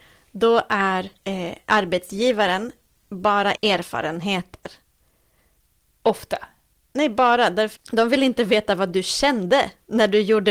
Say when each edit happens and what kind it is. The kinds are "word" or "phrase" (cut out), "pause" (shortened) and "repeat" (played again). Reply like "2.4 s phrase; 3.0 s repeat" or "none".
1.2 s pause; 3.5 s phrase; 7.7 s word